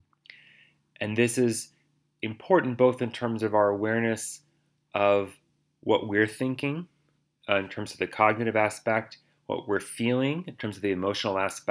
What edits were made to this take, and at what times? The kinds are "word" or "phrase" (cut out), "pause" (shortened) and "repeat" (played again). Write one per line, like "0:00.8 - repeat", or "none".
none